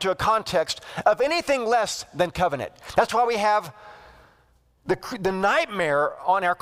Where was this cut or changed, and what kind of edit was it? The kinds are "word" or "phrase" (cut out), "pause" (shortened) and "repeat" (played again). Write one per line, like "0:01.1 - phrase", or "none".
none